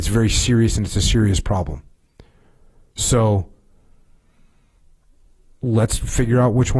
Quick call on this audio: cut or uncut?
uncut